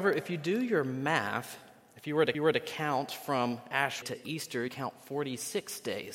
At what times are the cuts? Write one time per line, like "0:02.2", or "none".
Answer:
0:02.3
0:04.0
0:04.7